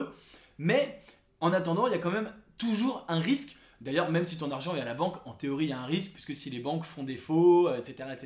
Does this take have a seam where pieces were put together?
no; 0 cuts

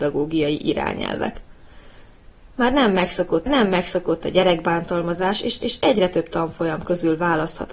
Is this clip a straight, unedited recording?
no; 2 cuts; at 3.5 s, 5.6 s

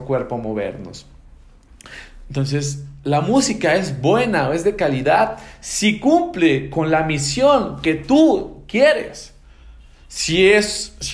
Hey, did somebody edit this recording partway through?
no; 0 cuts

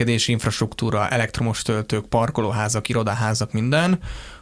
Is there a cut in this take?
no; 0 cuts

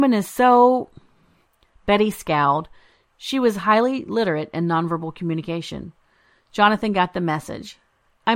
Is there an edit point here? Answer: no; 0 cuts

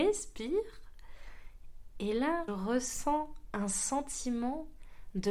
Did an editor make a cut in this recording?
yes; 1 cut; at 2.5 s

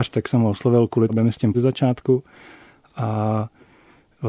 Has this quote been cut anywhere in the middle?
yes; 2 cuts; at 1.1 s, 1.5 s

